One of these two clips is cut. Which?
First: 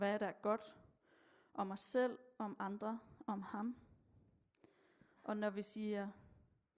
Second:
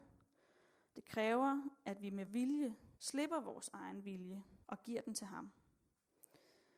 second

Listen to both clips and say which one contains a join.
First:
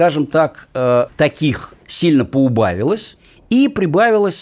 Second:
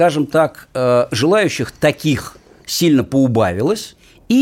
first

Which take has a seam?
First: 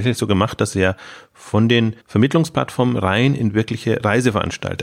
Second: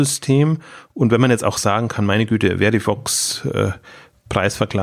first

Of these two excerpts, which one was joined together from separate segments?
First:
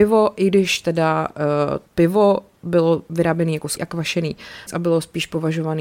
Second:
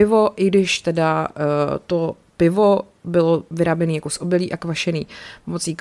first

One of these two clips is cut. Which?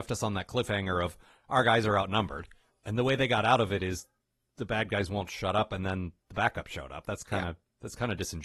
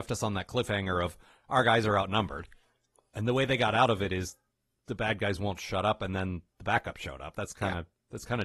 first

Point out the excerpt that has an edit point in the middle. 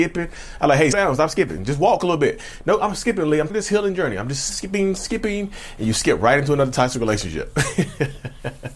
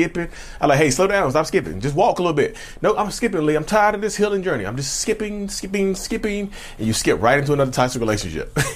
first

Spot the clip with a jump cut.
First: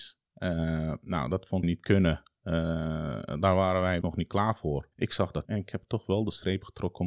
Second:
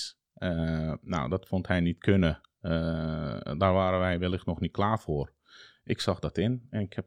first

